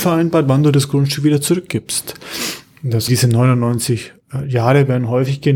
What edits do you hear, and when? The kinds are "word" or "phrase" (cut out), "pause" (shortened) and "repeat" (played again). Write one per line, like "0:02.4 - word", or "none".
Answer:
0:03.1 - phrase